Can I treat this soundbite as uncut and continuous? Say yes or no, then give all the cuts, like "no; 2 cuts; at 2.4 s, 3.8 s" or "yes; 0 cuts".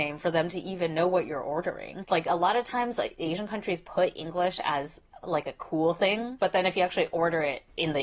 yes; 0 cuts